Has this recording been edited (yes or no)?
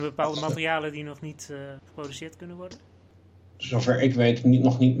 yes